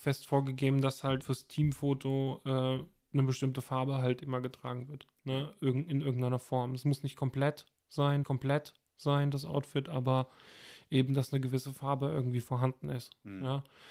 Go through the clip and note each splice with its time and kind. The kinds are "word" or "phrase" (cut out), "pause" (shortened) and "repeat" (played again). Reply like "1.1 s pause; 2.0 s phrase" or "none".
1.2 s word; 8.2 s repeat